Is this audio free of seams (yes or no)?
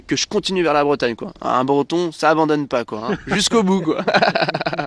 yes